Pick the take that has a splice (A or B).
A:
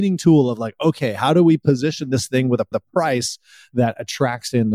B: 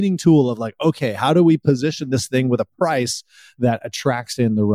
A